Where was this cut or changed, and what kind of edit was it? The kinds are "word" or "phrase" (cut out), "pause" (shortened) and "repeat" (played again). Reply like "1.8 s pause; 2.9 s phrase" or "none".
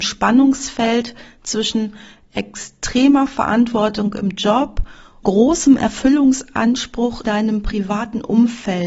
5.2 s word; 7.2 s word